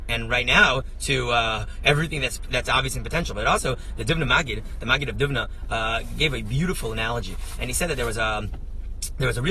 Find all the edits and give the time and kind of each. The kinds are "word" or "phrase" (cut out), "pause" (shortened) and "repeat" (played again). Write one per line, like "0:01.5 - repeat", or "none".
0:02.6 - word